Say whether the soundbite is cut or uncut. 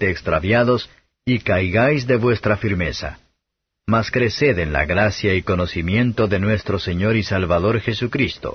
uncut